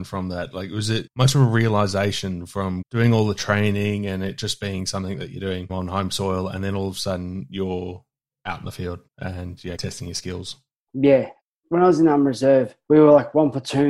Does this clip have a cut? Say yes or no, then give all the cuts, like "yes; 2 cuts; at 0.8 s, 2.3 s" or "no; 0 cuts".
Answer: yes; 2 cuts; at 9.1 s, 9.8 s